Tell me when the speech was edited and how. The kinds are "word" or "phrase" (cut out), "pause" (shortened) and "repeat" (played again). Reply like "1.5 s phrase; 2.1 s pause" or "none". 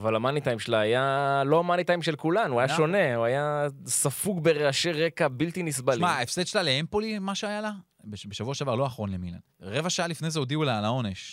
9.5 s pause

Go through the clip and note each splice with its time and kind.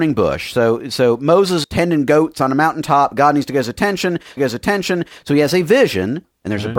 1.6 s phrase; 4.4 s repeat

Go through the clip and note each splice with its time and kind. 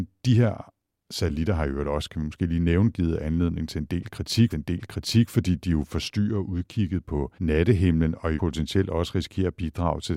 4.5 s repeat; 7.3 s pause; 8.4 s word

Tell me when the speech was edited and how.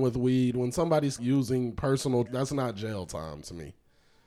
1.2 s word; 2.3 s word

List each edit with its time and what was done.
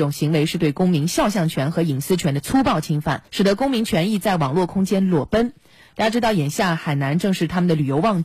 3.3 s pause

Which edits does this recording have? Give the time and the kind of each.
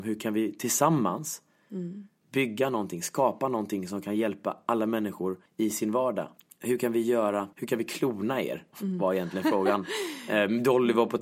5.5 s pause; 6.4 s pause; 7.5 s pause

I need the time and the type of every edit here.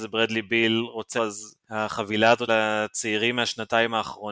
1.2 s word; 1.6 s pause; 2.5 s word

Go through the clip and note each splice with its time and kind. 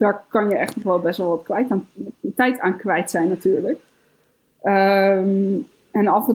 none

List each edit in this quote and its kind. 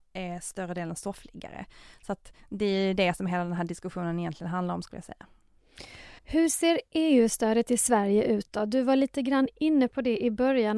6.2 s pause

